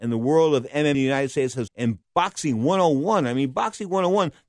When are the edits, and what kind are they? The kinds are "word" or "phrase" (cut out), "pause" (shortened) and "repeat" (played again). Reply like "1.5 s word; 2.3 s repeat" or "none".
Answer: 0.9 s word; 1.7 s word; 2.0 s word